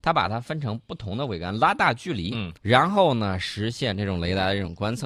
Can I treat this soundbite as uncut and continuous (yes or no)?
no